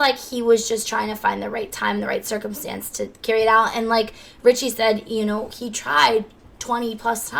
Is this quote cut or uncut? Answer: uncut